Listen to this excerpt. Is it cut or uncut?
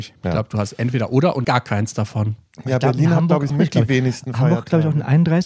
cut